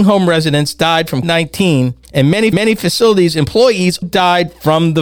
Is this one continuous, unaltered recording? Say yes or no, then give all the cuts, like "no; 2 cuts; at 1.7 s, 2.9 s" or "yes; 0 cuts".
no; 4 cuts; at 1.2 s, 2.0 s, 2.5 s, 4.0 s